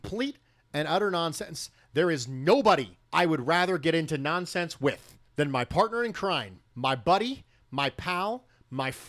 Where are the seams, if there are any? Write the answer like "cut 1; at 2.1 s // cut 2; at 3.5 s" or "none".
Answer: cut 1; at 3.0 s // cut 2; at 5.3 s // cut 3; at 6.7 s